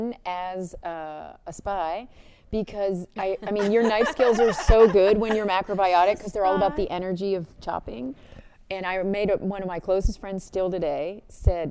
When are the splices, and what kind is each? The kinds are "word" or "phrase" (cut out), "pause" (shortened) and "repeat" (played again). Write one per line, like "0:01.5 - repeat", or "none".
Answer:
none